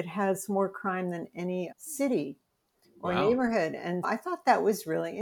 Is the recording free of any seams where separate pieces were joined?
no; 2 cuts; at 1.7 s, 4.0 s

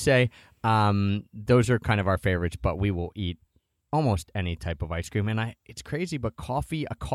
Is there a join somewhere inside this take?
no; 0 cuts

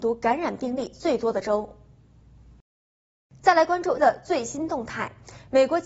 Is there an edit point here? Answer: yes; 1 cut; at 4.0 s

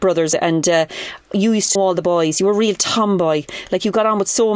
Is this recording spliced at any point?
yes; 1 cut; at 1.8 s

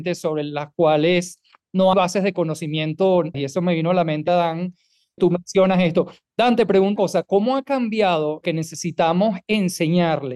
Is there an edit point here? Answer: yes; 6 cuts; at 1.9 s, 3.3 s, 4.3 s, 5.2 s, 7.0 s, 8.4 s

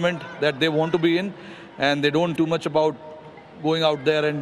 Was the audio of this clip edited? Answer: yes; 1 cut; at 2.4 s

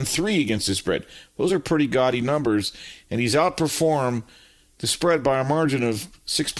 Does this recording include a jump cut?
no; 0 cuts

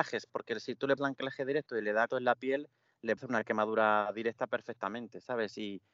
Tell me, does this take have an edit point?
yes; 3 cuts; at 1.0 s, 2.1 s, 3.2 s

